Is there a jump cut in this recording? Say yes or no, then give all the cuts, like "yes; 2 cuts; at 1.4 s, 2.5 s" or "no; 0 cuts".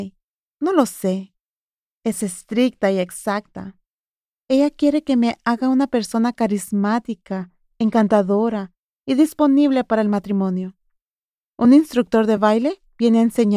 no; 0 cuts